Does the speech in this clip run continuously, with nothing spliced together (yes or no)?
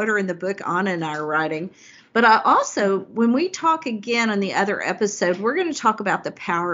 yes